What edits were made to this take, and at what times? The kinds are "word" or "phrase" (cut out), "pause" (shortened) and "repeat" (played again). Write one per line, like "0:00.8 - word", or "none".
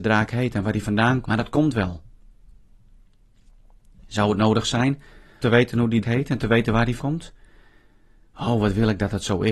0:01.2 - word
0:05.4 - word
0:06.0 - word
0:07.0 - word